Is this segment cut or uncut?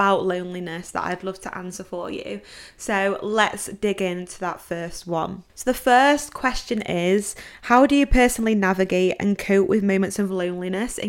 cut